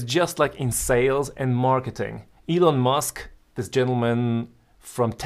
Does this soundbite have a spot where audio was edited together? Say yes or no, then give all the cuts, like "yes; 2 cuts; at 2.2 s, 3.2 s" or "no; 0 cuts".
yes; 1 cut; at 3.4 s